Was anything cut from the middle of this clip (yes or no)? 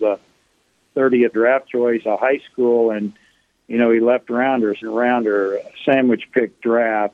yes